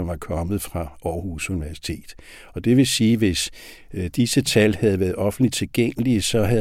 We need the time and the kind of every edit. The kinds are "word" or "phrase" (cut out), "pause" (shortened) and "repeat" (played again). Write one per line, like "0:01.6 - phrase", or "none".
none